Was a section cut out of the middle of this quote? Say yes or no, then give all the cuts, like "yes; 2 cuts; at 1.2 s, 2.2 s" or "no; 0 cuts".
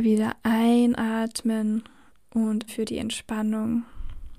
yes; 1 cut; at 2.7 s